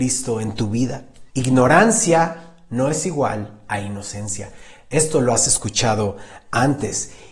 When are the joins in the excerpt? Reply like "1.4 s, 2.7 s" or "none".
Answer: 1.3 s